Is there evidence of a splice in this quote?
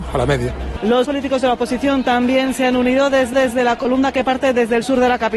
yes; 2 cuts; at 1.0 s, 3.3 s

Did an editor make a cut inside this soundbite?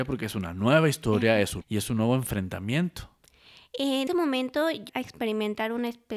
yes; 3 cuts; at 1.6 s, 4.1 s, 4.9 s

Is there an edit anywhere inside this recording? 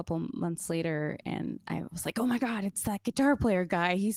no; 0 cuts

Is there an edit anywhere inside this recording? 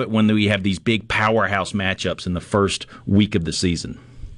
no; 0 cuts

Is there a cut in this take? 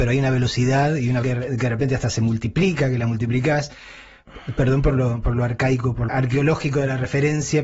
yes; 2 cuts; at 1.2 s, 6.1 s

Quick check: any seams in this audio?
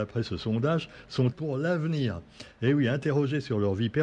yes; 1 cut; at 1.3 s

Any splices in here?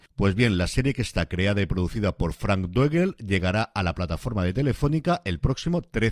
no; 0 cuts

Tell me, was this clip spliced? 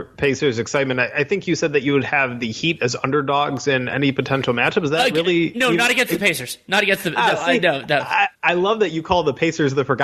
yes; 1 cut; at 8.3 s

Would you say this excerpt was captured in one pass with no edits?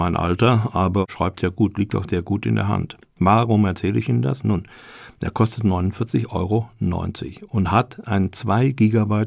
yes; 0 cuts

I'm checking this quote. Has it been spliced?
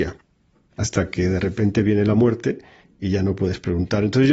no; 0 cuts

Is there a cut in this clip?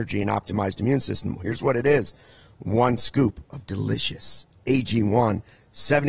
no; 0 cuts

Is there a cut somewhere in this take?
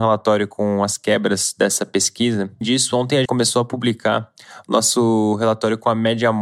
yes; 2 cuts; at 2.6 s, 3.2 s

